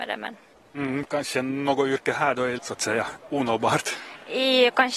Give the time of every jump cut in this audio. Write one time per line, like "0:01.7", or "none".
0:02.6